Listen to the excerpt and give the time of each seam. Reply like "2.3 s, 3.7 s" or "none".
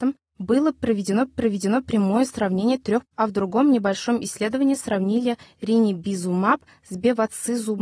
1.3 s, 3.0 s